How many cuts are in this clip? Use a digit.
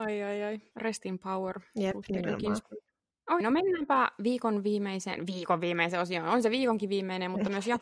1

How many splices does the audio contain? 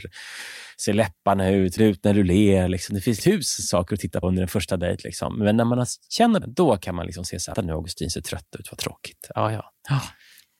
5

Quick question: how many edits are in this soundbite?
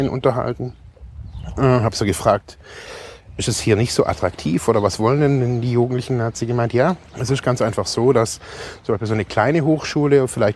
1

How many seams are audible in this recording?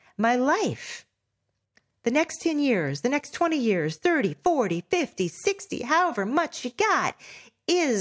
0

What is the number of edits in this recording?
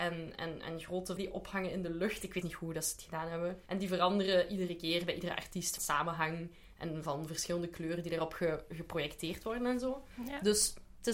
4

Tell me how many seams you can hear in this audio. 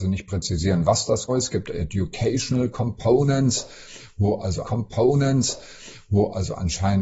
2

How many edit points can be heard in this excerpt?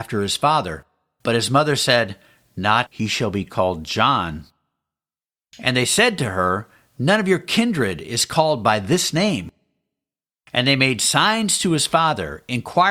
1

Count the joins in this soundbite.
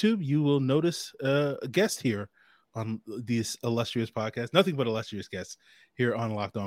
0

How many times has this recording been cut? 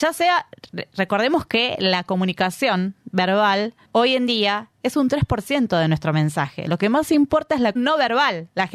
2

